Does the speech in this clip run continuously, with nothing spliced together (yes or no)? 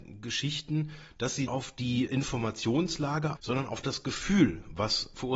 no